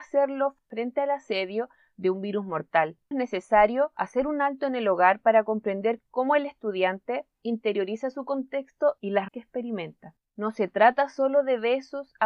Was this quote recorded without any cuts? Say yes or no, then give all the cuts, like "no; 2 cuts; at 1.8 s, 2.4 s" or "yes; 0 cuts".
no; 2 cuts; at 3.1 s, 9.3 s